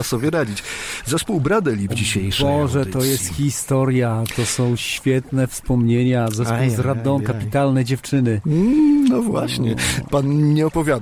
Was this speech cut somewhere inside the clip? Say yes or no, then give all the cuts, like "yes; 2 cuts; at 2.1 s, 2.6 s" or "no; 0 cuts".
yes; 2 cuts; at 1.9 s, 7.2 s